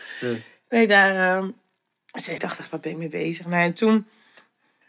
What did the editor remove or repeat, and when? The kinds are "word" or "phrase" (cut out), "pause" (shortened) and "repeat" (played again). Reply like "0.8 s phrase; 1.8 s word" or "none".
2.4 s word